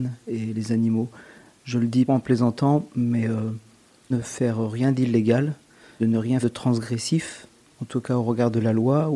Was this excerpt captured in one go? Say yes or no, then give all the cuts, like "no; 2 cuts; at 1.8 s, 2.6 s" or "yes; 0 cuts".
no; 4 cuts; at 2.1 s, 4.1 s, 6.0 s, 6.4 s